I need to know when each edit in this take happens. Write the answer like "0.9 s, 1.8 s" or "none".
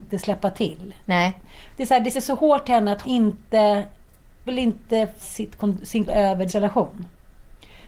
2.1 s, 3.0 s, 4.5 s, 5.2 s, 6.1 s, 6.5 s